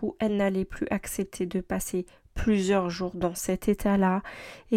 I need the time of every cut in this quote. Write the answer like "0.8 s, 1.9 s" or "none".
none